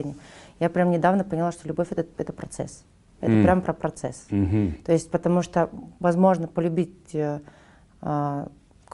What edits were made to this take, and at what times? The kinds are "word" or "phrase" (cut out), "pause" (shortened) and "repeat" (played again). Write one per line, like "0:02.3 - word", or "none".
none